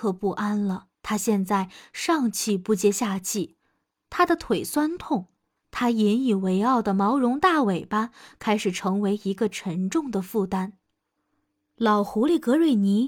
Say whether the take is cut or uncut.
cut